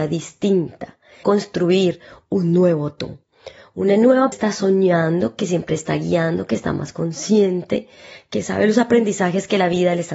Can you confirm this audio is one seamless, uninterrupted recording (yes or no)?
no